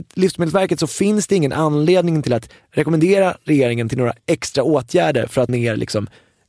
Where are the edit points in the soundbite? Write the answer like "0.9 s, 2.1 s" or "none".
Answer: 4.2 s, 5.5 s